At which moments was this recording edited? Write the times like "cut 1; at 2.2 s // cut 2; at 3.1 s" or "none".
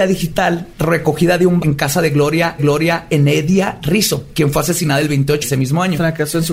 cut 1; at 1.6 s // cut 2; at 2.6 s // cut 3; at 5.4 s

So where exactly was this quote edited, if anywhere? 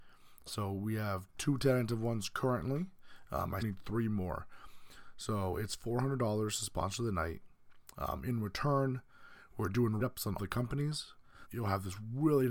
cut 1; at 3.6 s // cut 2; at 10.0 s // cut 3; at 10.4 s // cut 4; at 11.4 s

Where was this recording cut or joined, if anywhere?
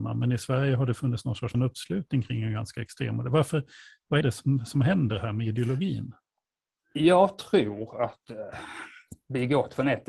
cut 1; at 1.5 s // cut 2; at 4.2 s

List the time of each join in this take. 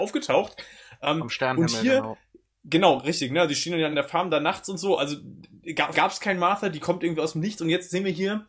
cut 1; at 3.9 s // cut 2; at 5.9 s

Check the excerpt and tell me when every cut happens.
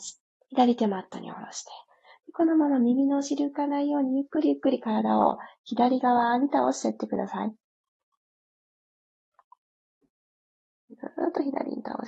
none

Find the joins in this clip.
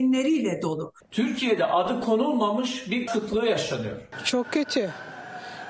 cut 1; at 3.1 s

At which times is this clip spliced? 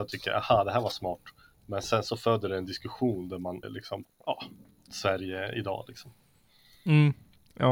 cut 1; at 3.6 s // cut 2; at 4.0 s

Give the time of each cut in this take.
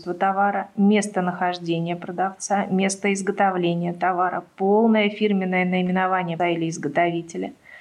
cut 1; at 6.4 s

